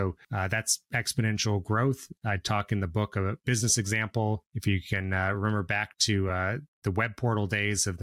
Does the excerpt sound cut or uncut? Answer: uncut